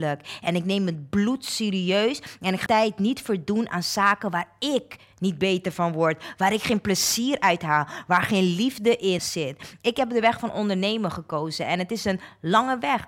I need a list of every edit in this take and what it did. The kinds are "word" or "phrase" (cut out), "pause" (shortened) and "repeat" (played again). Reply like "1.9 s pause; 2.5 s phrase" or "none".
2.7 s word; 9.2 s word